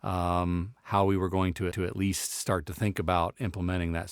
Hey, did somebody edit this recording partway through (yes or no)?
yes